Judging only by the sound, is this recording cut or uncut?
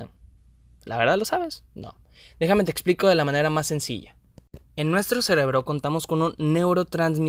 uncut